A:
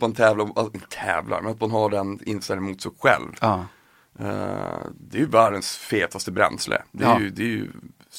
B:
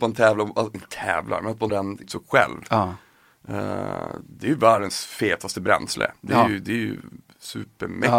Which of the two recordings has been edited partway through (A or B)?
B